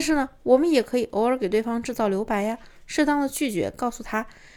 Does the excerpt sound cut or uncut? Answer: uncut